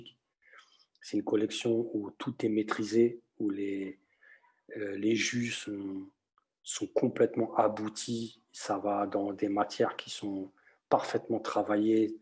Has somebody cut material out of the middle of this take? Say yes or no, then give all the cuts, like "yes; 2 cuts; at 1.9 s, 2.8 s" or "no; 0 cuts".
no; 0 cuts